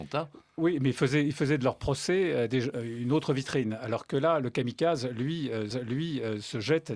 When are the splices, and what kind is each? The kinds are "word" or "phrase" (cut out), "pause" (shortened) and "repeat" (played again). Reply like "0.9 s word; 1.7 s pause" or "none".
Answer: 5.7 s repeat